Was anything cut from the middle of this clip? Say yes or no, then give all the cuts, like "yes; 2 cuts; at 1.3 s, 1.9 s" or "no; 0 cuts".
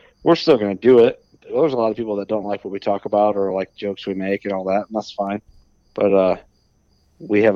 no; 0 cuts